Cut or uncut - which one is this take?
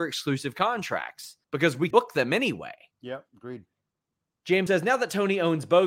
cut